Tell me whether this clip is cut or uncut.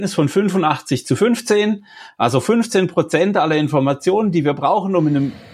uncut